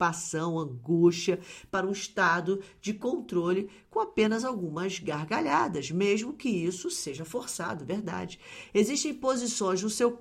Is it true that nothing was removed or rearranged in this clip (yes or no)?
yes